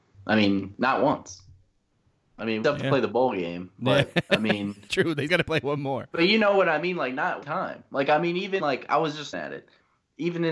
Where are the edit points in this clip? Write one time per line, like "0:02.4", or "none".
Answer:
0:02.6
0:04.9
0:05.3
0:07.4
0:08.6
0:09.3